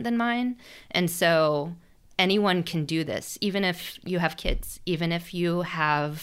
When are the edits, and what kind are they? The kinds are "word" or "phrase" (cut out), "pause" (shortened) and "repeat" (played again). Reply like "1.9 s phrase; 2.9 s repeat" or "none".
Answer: none